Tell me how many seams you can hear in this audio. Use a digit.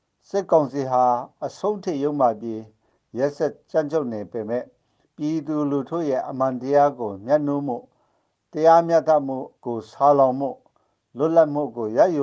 1